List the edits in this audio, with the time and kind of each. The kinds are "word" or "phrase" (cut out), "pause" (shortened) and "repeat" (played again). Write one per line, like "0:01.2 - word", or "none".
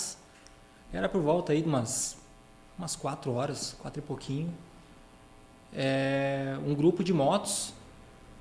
none